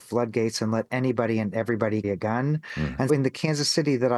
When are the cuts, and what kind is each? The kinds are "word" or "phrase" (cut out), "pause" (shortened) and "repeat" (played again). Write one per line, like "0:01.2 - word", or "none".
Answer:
0:02.0 - word
0:03.1 - word